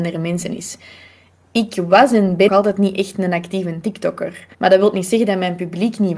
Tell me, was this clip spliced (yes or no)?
yes